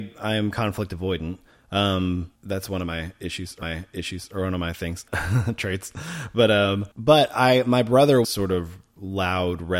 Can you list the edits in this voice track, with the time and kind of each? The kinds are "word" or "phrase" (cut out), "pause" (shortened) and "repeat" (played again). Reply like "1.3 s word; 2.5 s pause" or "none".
2.3 s pause; 3.6 s repeat; 5.1 s word; 6.9 s pause; 8.2 s phrase

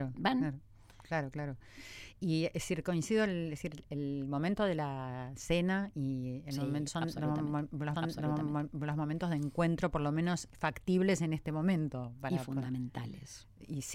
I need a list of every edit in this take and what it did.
6.9 s phrase; 7.9 s repeat; 10.5 s word

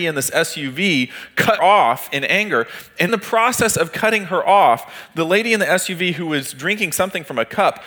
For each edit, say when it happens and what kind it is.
1.6 s word; 3.1 s word

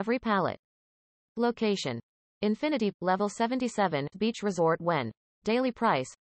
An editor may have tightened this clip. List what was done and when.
2.9 s word; 4.1 s word

